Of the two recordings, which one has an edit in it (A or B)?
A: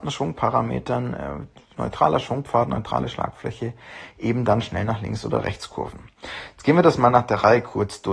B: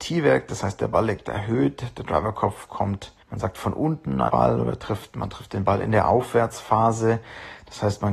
B